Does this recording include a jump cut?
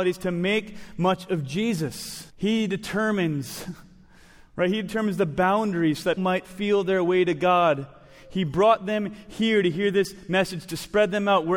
yes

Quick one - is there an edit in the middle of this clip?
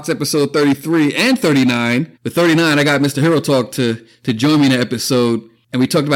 yes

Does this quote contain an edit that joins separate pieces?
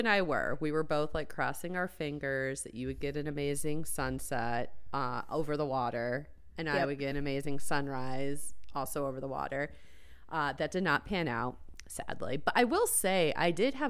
no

